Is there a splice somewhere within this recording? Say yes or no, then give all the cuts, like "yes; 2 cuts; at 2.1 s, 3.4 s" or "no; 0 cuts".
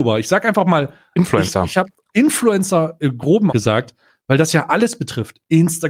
yes; 1 cut; at 3.5 s